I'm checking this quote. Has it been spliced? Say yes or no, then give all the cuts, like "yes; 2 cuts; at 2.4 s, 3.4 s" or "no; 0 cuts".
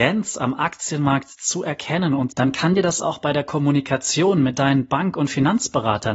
yes; 1 cut; at 2.3 s